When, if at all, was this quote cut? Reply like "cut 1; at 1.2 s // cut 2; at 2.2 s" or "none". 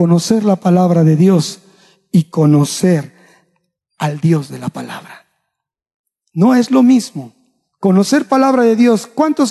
none